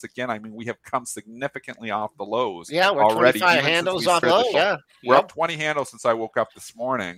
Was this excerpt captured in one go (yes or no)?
no